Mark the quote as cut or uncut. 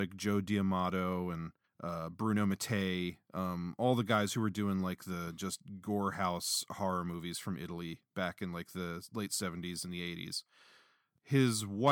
cut